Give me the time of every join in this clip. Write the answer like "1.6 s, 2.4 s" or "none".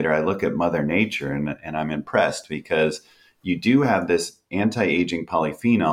none